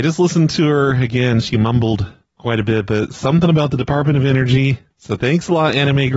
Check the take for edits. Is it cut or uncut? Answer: uncut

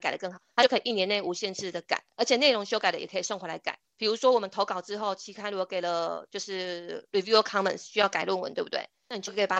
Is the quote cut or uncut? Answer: cut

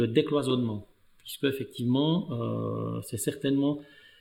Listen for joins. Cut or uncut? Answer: uncut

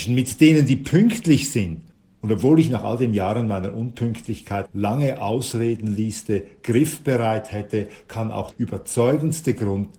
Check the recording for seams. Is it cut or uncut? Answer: cut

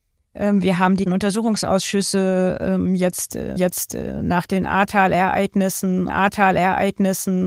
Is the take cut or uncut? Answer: cut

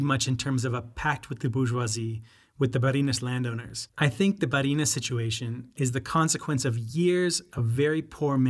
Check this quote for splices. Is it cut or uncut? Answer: uncut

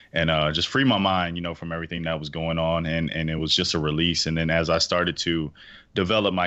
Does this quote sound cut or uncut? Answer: uncut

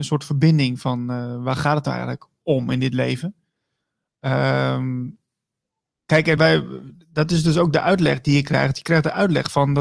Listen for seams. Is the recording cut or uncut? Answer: cut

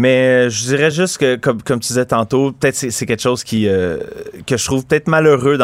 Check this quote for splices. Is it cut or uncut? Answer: uncut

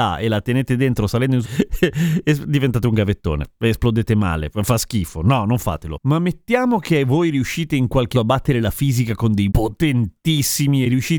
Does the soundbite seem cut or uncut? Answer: cut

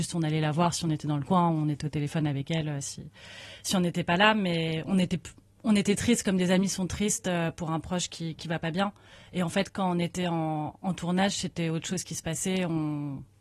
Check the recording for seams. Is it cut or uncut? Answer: uncut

